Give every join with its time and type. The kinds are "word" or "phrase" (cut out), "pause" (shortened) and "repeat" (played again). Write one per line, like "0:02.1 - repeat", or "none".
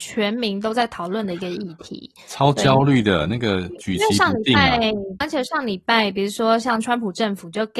0:05.2 - phrase